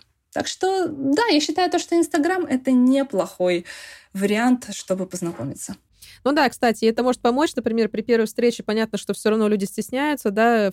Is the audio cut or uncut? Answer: uncut